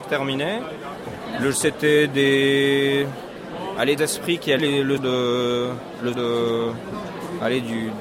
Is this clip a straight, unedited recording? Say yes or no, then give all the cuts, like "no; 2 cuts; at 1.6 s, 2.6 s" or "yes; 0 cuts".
no; 5 cuts; at 1.5 s, 4.0 s, 4.6 s, 5.0 s, 6.1 s